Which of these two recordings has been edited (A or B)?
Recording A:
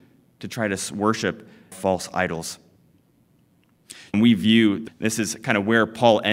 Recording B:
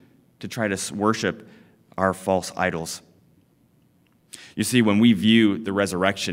A